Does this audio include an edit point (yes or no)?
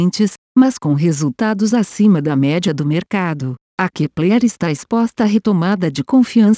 no